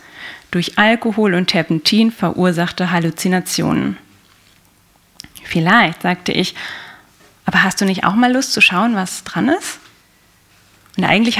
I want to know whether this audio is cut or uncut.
uncut